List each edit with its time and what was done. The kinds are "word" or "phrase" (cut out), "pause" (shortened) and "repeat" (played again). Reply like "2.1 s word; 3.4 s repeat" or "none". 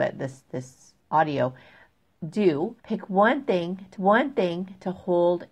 1.0 s pause; 2.8 s pause; 4.0 s repeat